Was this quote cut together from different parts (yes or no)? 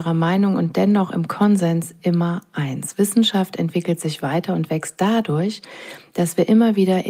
no